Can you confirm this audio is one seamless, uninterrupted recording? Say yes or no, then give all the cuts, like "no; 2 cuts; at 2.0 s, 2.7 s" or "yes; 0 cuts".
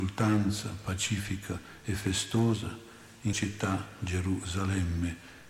no; 1 cut; at 3.3 s